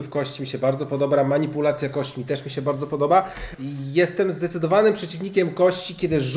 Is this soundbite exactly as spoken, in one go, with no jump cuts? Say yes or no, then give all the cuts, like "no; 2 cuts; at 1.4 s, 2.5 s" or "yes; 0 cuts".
yes; 0 cuts